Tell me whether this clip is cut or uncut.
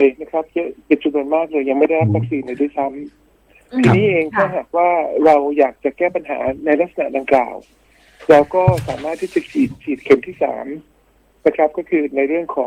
uncut